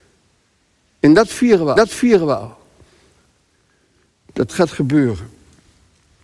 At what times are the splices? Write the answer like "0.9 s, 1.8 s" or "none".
1.8 s, 4.5 s